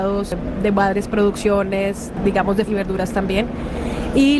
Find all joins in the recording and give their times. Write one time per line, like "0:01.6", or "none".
0:02.7

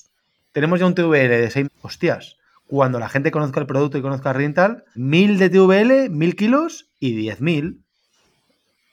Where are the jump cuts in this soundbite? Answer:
0:01.6
0:04.9

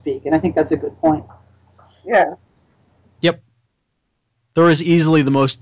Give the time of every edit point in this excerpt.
none

